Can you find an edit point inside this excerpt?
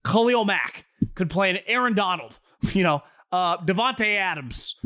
no; 0 cuts

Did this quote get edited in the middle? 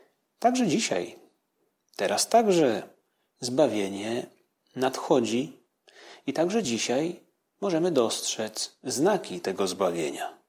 no; 0 cuts

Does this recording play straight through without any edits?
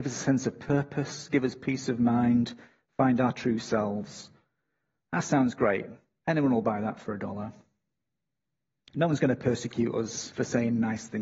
yes; 0 cuts

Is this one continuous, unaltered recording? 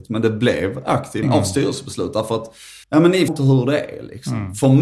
no; 3 cuts; at 1.2 s, 2.8 s, 3.3 s

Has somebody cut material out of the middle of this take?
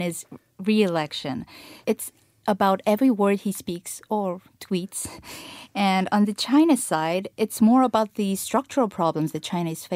yes; 1 cut; at 1.8 s

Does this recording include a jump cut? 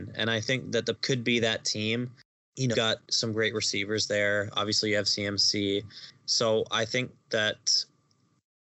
yes; 2 cuts; at 1.0 s, 2.7 s

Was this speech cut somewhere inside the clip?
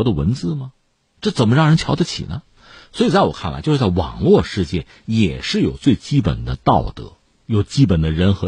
no; 0 cuts

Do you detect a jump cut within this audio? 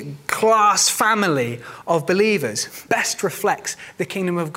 yes; 1 cut; at 2.9 s

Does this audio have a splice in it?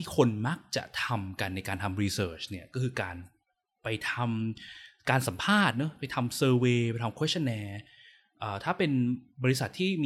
no; 0 cuts

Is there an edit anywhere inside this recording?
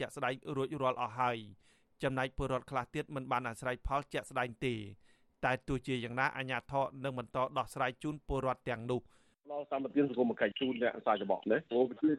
no; 0 cuts

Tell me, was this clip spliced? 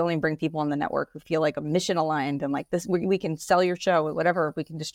no; 0 cuts

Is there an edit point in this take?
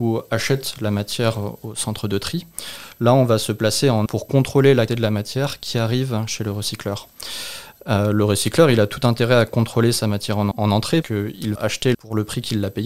yes; 6 cuts; at 4.1 s, 4.9 s, 10.5 s, 11.0 s, 11.6 s, 11.9 s

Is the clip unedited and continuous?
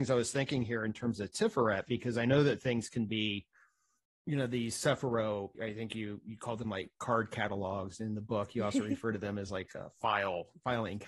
yes; 0 cuts

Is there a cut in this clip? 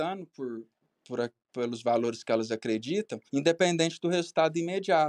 yes; 1 cut; at 3.3 s

